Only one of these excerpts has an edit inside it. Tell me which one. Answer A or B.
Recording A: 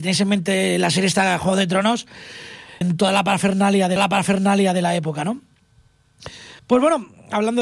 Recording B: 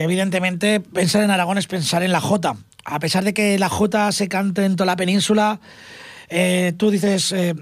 A